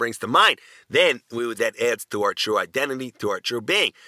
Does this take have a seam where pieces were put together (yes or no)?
yes